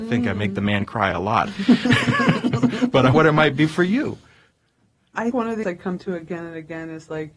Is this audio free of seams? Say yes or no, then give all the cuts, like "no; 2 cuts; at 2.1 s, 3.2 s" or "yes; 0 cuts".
no; 4 cuts; at 3.1 s, 5.3 s, 5.6 s, 6.0 s